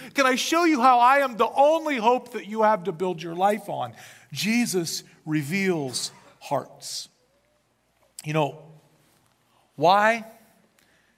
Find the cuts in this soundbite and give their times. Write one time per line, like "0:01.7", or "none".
none